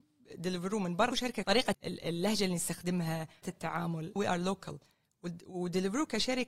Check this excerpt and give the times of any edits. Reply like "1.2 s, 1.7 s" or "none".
1.1 s, 1.4 s, 1.7 s, 3.4 s, 4.2 s